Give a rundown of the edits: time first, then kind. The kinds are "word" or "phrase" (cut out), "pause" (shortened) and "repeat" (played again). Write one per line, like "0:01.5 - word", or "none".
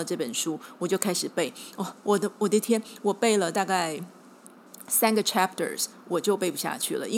none